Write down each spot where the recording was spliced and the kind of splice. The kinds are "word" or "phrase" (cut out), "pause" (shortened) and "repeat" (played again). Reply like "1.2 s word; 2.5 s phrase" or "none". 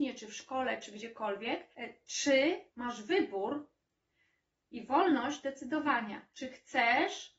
1.7 s pause; 2.7 s pause; 6.3 s pause